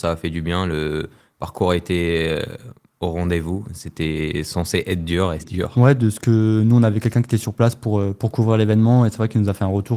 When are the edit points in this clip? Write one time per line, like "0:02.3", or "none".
0:05.4

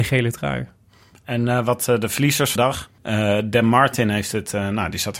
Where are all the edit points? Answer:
0:02.6
0:03.0

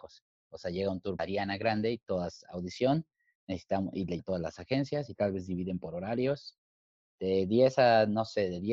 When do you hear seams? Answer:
0:01.2
0:04.2

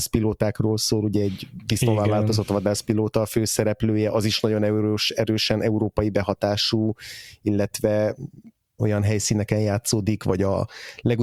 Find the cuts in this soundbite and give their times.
0:08.8

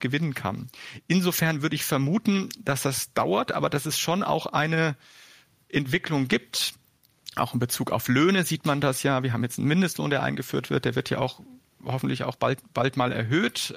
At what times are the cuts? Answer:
none

